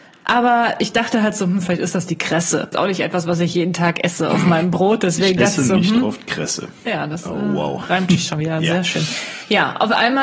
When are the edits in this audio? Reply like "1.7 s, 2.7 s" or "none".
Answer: 2.7 s